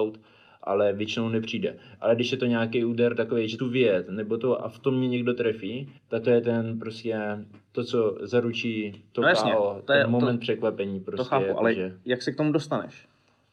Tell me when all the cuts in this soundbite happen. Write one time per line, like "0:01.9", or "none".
0:03.6
0:06.0